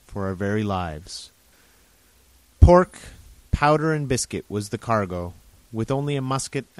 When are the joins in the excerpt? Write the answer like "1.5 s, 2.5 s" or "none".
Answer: none

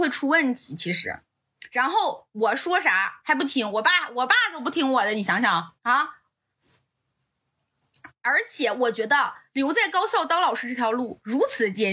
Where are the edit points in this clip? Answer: 5.8 s

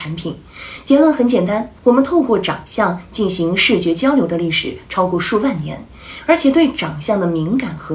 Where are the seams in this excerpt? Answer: 1.8 s

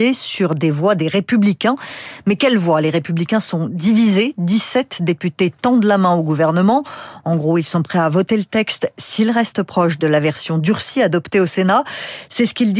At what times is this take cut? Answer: none

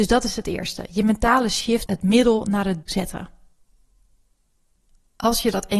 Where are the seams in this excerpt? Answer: 1.9 s, 2.8 s

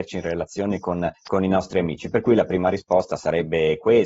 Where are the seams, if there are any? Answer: 1.1 s

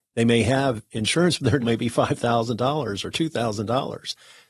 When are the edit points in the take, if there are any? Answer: 1.6 s

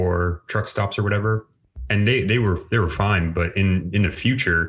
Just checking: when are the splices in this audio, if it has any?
none

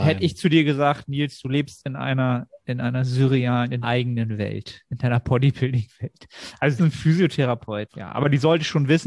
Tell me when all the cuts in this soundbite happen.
2.6 s, 3.8 s, 6.8 s, 7.9 s

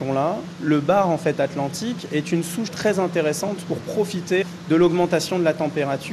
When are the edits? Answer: none

